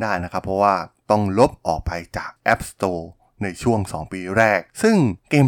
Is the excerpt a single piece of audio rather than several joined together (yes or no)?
yes